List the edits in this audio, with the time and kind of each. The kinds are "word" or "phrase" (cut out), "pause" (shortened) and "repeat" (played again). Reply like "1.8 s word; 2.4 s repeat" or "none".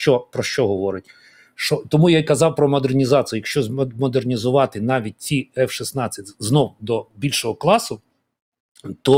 none